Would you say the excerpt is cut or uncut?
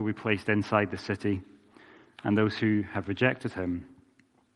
uncut